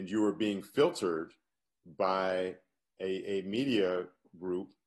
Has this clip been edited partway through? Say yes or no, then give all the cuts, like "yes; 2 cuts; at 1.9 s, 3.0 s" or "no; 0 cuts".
no; 0 cuts